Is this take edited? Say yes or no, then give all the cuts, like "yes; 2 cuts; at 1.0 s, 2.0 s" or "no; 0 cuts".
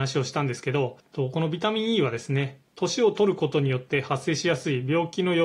no; 0 cuts